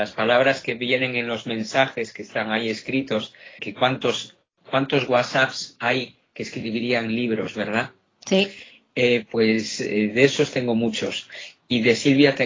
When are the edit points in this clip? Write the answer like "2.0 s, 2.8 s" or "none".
3.6 s, 9.3 s